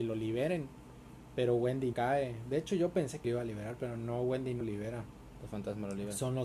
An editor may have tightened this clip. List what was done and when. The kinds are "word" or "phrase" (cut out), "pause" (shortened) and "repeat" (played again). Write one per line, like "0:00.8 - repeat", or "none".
0:01.9 - word
0:03.2 - phrase
0:04.6 - word